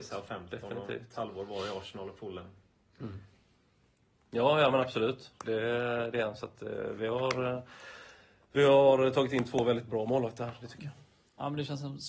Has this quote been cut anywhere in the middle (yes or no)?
no